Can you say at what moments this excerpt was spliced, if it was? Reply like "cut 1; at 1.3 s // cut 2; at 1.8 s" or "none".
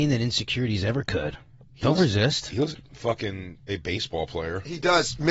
cut 1; at 2.7 s // cut 2; at 3.7 s